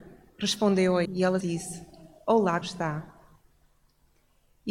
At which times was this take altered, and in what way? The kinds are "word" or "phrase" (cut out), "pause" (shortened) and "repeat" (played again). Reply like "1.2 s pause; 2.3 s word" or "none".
1.1 s word; 1.4 s word; 2.6 s word